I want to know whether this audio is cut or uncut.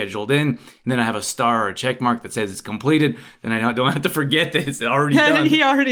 uncut